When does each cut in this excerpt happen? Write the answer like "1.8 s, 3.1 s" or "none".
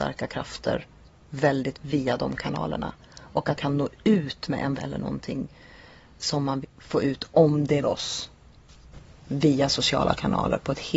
1.7 s, 3.6 s, 4.8 s, 6.6 s, 7.8 s